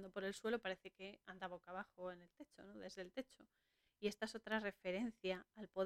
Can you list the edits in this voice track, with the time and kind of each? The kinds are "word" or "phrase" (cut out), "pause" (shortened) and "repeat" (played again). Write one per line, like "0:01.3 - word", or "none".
none